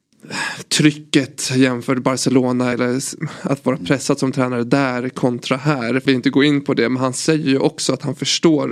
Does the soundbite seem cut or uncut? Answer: cut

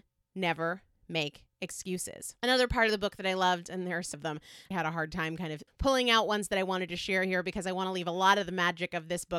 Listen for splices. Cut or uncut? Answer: cut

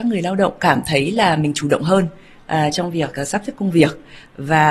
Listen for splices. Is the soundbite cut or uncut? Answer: uncut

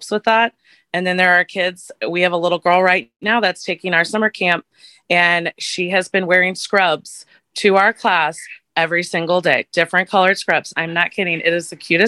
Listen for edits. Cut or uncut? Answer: uncut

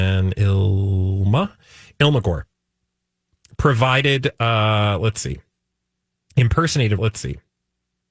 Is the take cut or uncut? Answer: cut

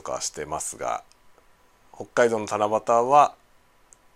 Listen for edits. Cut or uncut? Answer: uncut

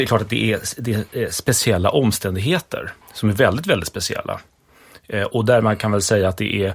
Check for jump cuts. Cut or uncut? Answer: cut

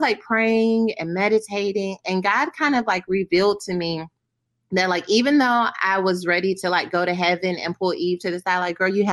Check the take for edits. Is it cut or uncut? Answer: uncut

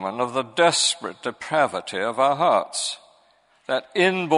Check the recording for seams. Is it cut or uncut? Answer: uncut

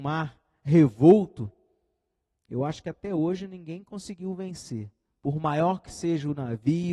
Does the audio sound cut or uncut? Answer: uncut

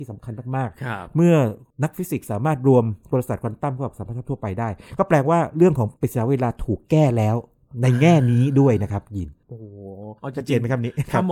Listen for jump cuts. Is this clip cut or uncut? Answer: cut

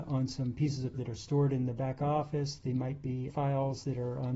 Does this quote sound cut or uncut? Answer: cut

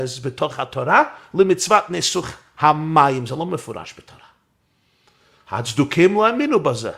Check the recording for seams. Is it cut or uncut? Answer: uncut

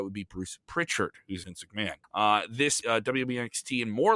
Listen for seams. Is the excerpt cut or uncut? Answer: cut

